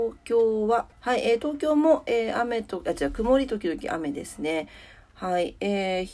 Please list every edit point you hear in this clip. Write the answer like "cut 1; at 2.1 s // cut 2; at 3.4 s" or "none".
cut 1; at 0.9 s